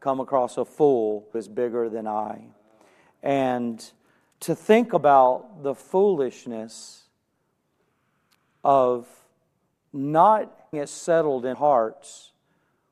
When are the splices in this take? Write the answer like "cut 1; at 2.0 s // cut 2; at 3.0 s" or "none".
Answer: cut 1; at 1.3 s // cut 2; at 4.3 s // cut 3; at 10.7 s // cut 4; at 11.5 s